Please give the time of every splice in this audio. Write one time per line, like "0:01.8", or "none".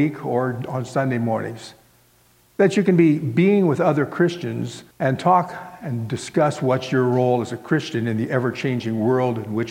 0:04.9

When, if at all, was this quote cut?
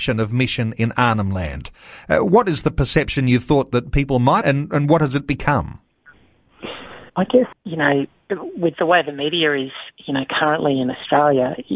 0:04.4
0:07.1
0:07.5
0:09.9

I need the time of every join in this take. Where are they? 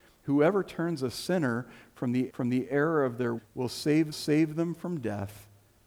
0:02.3
0:03.4
0:04.1

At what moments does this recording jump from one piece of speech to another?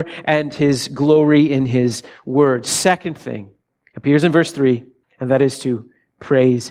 0:03.7
0:05.0

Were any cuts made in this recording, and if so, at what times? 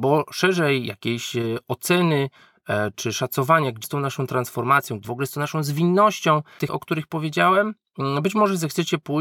0:02.9
0:03.8
0:05.0
0:06.7

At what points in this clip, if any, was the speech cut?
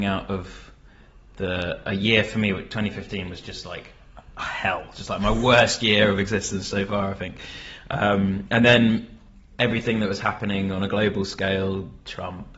none

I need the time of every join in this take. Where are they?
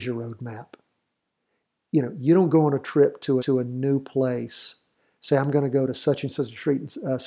0:03.4

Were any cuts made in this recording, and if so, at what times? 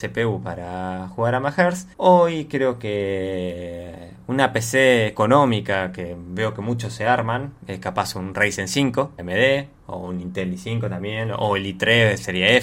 0:01.9
0:09.2

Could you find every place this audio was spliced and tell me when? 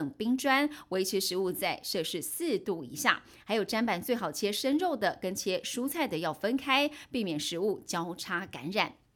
none

